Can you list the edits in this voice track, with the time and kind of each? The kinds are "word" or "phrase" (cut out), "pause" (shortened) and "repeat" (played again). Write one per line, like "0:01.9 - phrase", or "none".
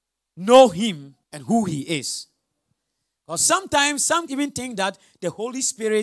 0:01.2 - pause
0:04.3 - word